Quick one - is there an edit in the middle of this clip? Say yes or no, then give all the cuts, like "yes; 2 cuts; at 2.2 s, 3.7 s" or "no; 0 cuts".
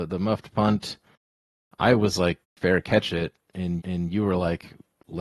yes; 2 cuts; at 2.4 s, 3.8 s